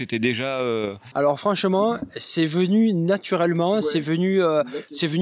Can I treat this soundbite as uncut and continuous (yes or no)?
yes